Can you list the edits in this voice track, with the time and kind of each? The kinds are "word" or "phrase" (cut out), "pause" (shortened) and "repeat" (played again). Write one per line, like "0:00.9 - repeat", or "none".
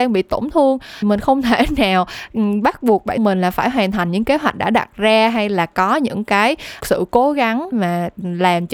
0:01.0 - word
0:03.2 - word
0:06.8 - word
0:07.7 - word